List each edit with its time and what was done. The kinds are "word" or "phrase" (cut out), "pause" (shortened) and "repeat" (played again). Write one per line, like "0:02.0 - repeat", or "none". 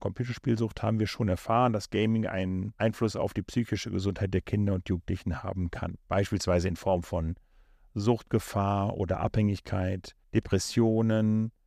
0:10.2 - pause